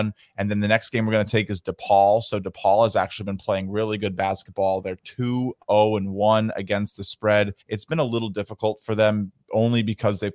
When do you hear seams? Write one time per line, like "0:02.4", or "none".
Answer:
0:07.6
0:09.4